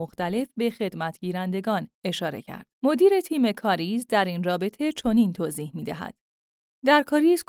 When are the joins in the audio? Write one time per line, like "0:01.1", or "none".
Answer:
0:01.9
0:02.7